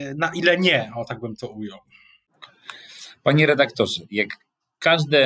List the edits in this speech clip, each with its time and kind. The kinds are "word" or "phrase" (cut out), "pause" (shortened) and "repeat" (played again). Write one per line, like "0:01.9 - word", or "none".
none